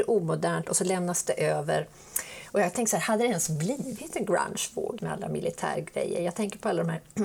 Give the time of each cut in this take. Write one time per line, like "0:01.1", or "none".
0:05.0